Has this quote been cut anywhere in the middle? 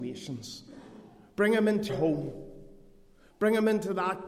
yes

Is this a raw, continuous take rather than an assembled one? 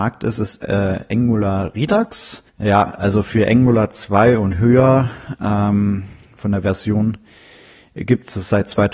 no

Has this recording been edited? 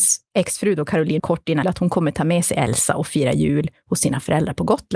yes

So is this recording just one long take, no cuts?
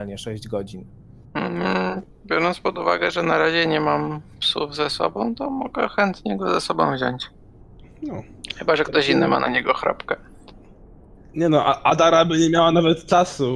yes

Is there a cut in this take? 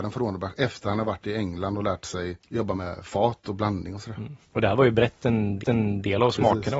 yes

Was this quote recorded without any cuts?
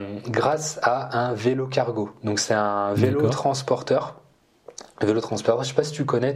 yes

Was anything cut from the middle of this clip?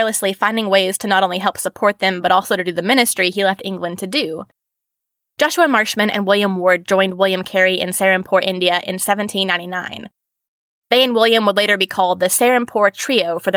no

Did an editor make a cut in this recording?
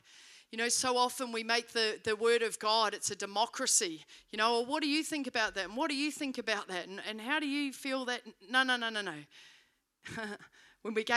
no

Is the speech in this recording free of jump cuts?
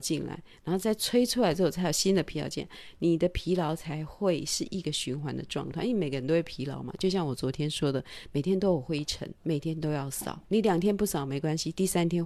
no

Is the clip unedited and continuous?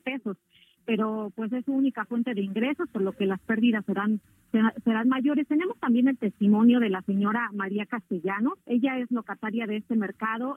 no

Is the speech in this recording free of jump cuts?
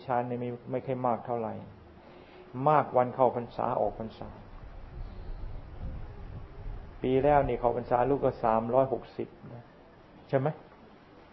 yes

